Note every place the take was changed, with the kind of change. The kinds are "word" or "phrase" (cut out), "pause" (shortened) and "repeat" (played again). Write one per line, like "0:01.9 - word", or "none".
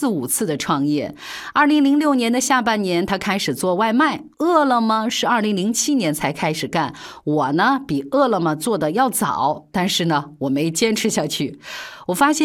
0:04.3 - pause